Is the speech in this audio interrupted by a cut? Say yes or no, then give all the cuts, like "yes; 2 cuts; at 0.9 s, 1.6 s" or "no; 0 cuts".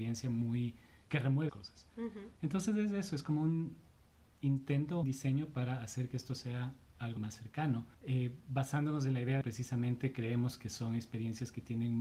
yes; 5 cuts; at 1.5 s, 5.0 s, 7.2 s, 7.9 s, 9.4 s